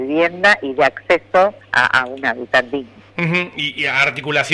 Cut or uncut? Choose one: cut